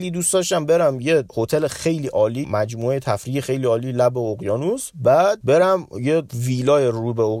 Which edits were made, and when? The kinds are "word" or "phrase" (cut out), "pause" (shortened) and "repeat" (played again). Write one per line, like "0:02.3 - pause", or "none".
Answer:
0:02.4 - word